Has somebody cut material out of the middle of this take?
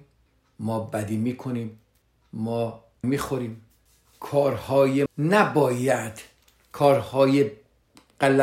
yes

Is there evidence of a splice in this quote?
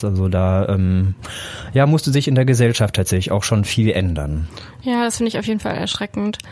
no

